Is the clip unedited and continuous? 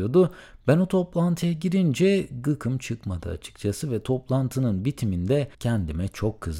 no; 1 cut; at 5.5 s

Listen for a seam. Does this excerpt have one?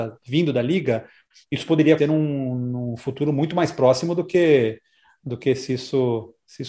yes; 1 cut; at 2.0 s

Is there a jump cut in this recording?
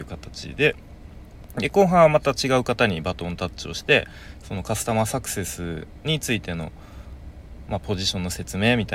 no; 0 cuts

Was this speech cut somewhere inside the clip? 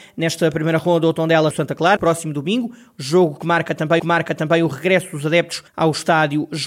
yes; 4 cuts; at 1.5 s, 2.0 s, 4.0 s, 5.7 s

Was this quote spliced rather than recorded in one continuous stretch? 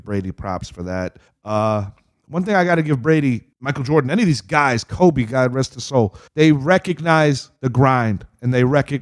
yes; 4 cuts; at 1.3 s, 3.5 s, 6.3 s, 7.6 s

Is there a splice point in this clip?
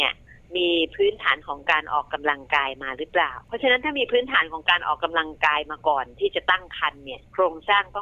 yes; 1 cut; at 3.4 s

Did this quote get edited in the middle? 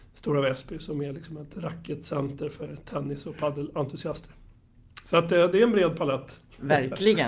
no; 0 cuts

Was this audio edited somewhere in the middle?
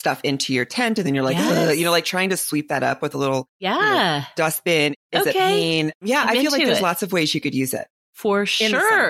yes; 1 cut; at 3.5 s

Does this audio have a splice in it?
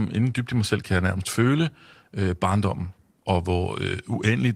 no; 0 cuts

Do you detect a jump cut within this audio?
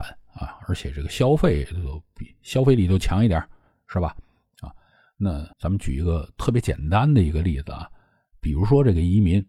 yes; 1 cut; at 5.5 s

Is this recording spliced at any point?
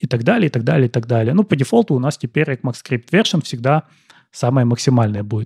no; 0 cuts

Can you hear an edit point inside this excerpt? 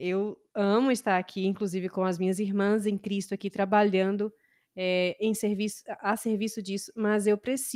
no; 0 cuts

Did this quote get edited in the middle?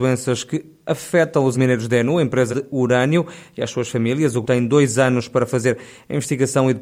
yes; 3 cuts; at 1.5 s, 2.5 s, 4.4 s

